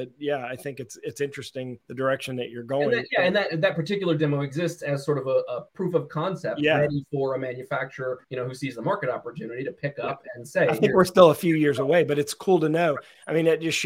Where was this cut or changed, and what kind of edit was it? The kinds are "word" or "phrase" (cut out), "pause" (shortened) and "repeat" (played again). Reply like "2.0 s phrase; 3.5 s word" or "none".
1.8 s pause; 5.7 s pause; 8.2 s pause

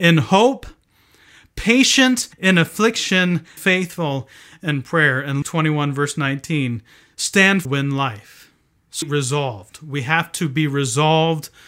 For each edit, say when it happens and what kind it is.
2.3 s pause; 3.6 s word; 5.4 s word; 7.6 s phrase; 9.0 s phrase

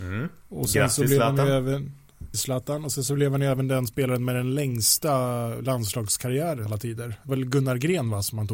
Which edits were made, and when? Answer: 2.3 s word; 6.7 s word; 7.3 s word

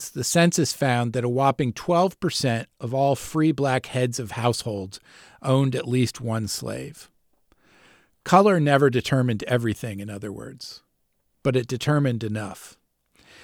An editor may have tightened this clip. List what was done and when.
none

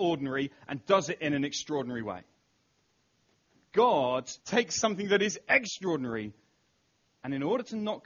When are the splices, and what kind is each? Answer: 4.4 s pause

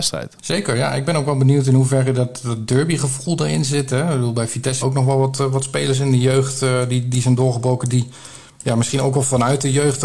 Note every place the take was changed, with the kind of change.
4.8 s phrase

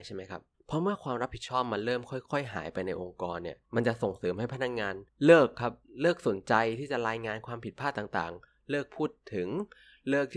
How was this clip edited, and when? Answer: 3.6 s pause; 5.1 s pause

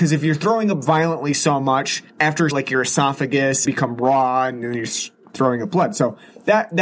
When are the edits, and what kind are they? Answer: 2.1 s pause; 2.5 s phrase; 3.6 s phrase

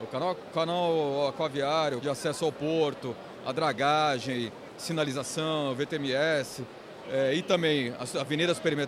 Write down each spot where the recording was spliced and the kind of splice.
2.0 s word

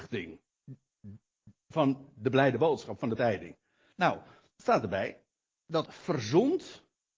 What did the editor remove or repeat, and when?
3.2 s word; 5.9 s word

